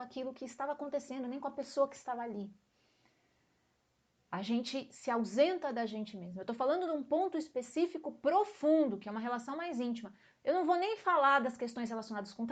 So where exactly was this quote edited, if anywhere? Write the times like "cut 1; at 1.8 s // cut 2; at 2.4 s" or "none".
none